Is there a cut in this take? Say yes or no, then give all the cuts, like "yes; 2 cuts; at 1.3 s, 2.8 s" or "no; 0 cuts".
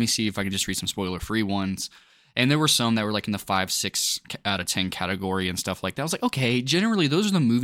no; 0 cuts